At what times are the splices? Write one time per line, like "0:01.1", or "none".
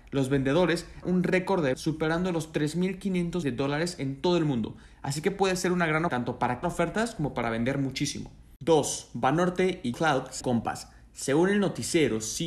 0:01.0
0:01.7
0:03.4
0:06.1
0:06.6
0:09.9
0:10.4